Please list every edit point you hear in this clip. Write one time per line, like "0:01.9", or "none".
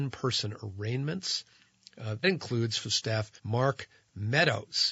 0:02.2
0:02.8
0:03.4